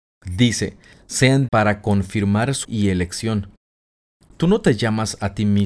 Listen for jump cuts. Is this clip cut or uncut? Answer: cut